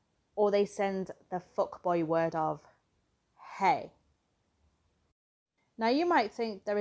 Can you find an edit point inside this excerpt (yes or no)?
no